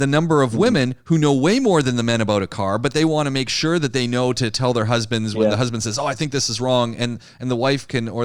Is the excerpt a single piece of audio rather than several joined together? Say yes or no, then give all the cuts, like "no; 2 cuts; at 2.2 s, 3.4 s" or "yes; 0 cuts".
yes; 0 cuts